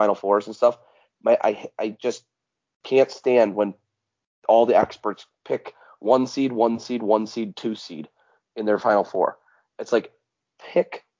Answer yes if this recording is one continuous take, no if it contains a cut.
yes